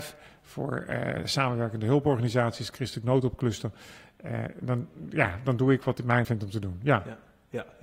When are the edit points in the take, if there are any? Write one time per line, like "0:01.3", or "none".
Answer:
0:06.2